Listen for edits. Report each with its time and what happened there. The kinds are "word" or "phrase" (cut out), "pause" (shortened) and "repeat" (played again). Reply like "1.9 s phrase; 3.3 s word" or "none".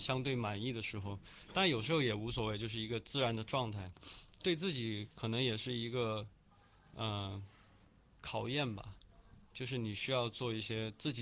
none